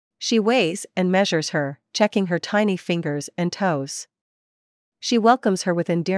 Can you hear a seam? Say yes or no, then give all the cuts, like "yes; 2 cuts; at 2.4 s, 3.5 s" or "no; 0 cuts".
no; 0 cuts